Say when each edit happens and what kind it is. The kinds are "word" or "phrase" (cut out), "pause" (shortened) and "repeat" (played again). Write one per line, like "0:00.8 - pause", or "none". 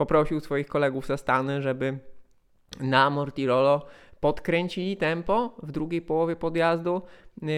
none